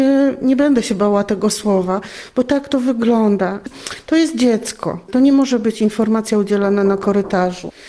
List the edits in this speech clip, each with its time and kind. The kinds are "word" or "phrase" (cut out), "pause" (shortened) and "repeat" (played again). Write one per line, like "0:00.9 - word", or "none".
none